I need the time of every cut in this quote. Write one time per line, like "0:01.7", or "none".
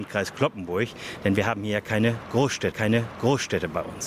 0:02.7